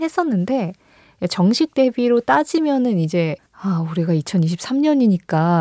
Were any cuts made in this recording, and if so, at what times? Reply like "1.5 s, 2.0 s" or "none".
3.5 s